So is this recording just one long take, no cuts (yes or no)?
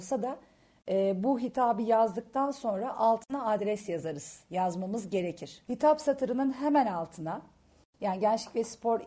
yes